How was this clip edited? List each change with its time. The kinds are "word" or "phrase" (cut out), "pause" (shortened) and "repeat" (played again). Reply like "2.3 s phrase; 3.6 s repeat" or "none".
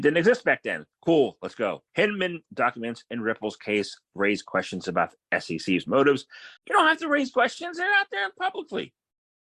0.9 s pause; 1.9 s pause; 6.6 s pause